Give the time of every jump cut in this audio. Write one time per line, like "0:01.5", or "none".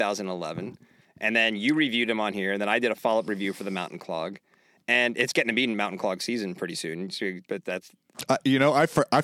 none